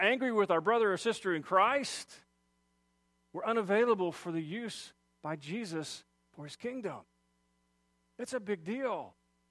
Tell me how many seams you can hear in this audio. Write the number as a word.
zero